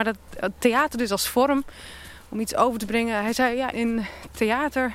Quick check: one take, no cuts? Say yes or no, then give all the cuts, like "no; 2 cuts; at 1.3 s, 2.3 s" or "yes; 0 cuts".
no; 1 cut; at 3.7 s